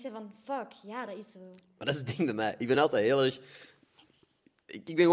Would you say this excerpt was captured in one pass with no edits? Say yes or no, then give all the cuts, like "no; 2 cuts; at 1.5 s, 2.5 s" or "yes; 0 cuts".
yes; 0 cuts